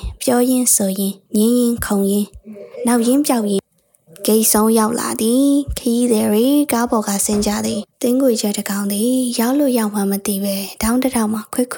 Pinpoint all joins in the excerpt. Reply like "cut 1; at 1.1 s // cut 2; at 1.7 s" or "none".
cut 1; at 1.3 s // cut 2; at 7.9 s